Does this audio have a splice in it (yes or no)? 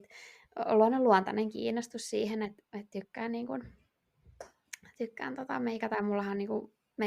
no